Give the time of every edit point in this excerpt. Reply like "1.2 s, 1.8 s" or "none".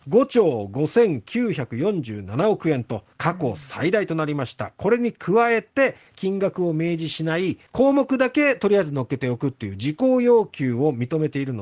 3.1 s, 7.7 s